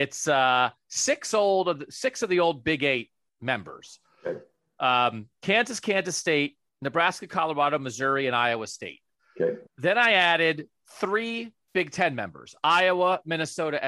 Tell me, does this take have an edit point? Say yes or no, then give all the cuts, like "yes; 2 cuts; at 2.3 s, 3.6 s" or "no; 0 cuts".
yes; 1 cut; at 9.7 s